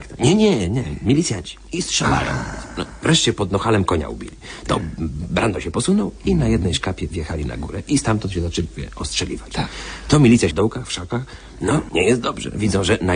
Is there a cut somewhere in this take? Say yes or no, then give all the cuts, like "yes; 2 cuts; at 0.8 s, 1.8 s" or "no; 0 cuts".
yes; 2 cuts; at 10.5 s, 11.9 s